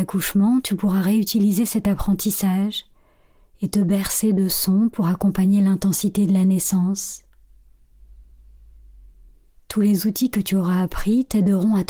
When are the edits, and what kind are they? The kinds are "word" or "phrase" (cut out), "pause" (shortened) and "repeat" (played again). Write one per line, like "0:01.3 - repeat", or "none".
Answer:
none